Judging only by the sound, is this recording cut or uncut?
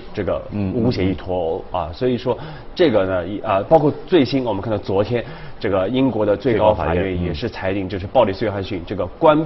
uncut